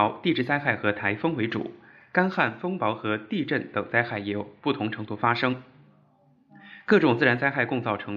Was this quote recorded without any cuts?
yes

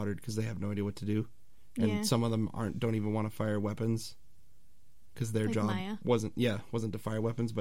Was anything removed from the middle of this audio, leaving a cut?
no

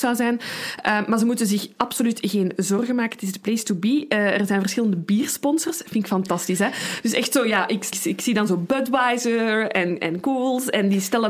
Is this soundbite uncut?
no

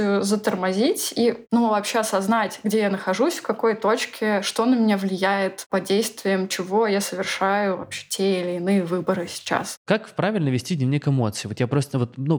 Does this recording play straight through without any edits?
yes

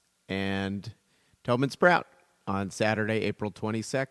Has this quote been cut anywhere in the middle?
no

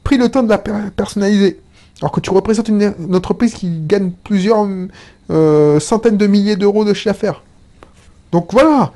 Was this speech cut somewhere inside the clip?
no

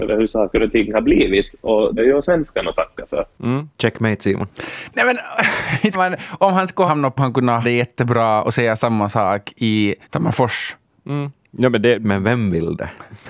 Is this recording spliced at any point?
yes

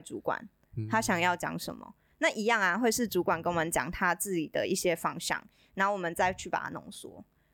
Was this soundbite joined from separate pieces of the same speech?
no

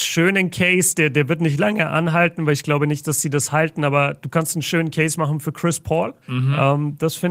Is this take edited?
yes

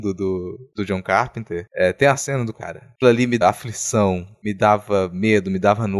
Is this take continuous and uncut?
no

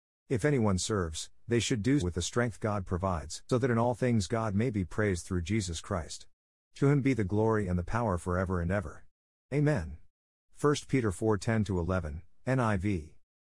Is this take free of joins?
no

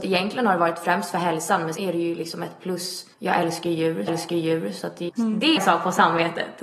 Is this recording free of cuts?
no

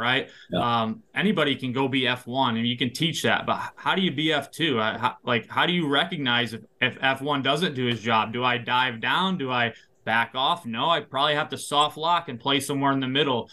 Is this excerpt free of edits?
yes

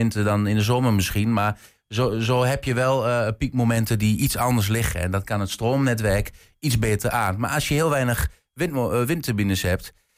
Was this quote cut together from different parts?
no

